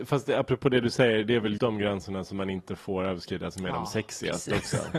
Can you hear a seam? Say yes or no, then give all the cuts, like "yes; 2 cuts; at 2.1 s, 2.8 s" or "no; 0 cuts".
yes; 1 cut; at 1.6 s